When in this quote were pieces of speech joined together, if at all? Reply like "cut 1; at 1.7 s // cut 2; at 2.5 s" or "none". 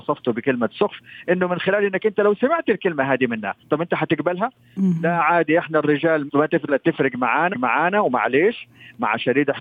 cut 1; at 6.3 s // cut 2; at 6.7 s // cut 3; at 7.5 s